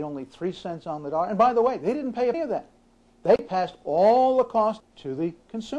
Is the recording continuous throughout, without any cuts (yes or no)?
no